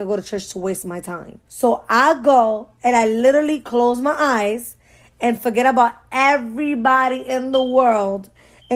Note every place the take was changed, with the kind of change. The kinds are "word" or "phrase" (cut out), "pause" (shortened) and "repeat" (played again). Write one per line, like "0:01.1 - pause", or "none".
0:01.5 - pause